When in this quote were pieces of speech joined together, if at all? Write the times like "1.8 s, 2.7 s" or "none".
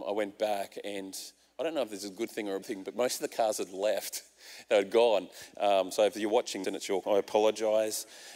2.6 s, 6.6 s, 7.0 s